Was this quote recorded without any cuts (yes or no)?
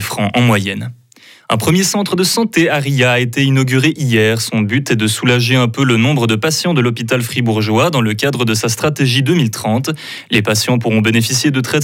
yes